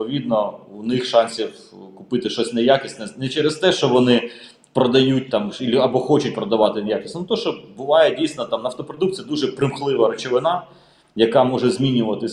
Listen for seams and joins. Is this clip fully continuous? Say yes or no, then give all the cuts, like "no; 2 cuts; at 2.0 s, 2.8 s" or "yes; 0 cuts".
yes; 0 cuts